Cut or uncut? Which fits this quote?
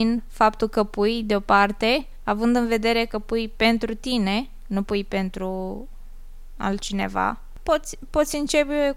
uncut